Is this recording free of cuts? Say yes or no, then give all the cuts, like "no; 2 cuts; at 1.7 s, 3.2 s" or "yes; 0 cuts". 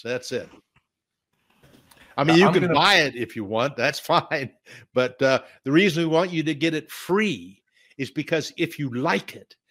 yes; 0 cuts